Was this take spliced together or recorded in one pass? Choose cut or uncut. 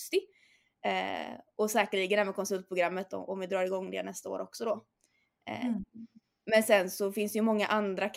uncut